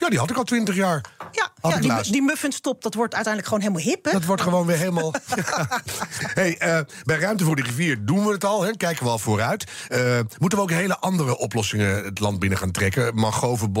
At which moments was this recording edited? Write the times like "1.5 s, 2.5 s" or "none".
none